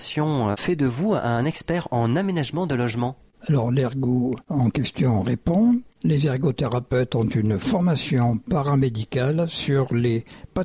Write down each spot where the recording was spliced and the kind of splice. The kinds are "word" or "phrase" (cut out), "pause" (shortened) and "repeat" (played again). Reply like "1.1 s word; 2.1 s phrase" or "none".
none